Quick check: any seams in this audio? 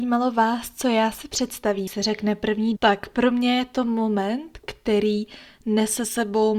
yes; 2 cuts; at 1.9 s, 2.8 s

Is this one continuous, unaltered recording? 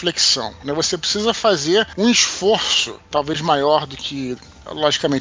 yes; 0 cuts

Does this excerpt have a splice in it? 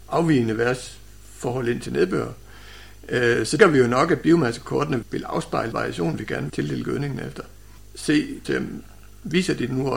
yes; 6 cuts; at 1.9 s, 3.6 s, 5.0 s, 5.7 s, 6.5 s, 8.4 s

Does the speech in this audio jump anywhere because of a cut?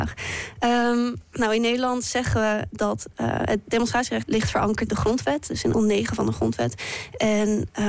yes; 3 cuts; at 4.2 s, 4.9 s, 5.7 s

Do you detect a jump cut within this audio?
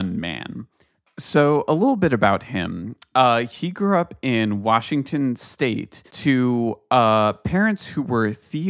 yes; 1 cut; at 6.1 s

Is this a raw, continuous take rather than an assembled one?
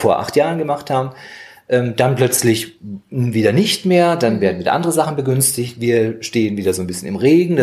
yes; 0 cuts

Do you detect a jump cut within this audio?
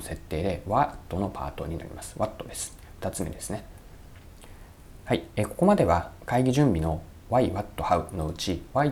no; 0 cuts

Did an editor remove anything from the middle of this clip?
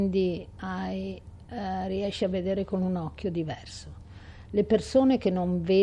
no; 0 cuts

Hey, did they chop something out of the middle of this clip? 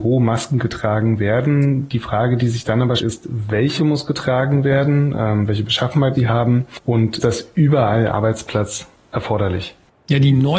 yes; 5 cuts; at 3.0 s, 3.8 s, 6.1 s, 7.2 s, 8.1 s

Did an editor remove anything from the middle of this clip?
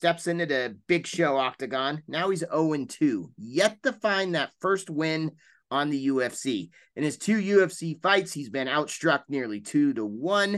no; 0 cuts

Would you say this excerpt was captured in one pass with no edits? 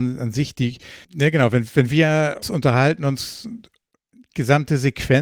no; 2 cuts; at 1.0 s, 2.4 s

